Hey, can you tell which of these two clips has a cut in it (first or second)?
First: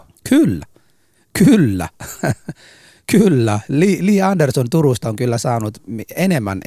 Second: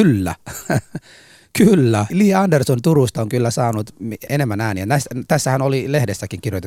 second